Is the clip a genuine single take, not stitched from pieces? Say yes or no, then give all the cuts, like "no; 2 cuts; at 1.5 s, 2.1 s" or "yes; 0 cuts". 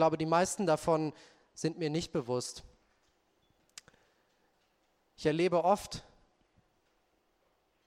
yes; 0 cuts